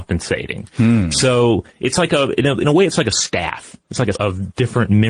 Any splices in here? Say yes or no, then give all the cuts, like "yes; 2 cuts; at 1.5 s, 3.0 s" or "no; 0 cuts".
yes; 1 cut; at 4.1 s